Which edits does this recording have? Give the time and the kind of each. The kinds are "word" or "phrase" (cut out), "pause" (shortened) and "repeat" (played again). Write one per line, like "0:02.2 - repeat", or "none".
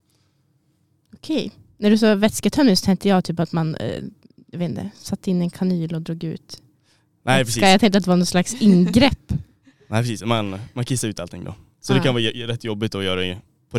none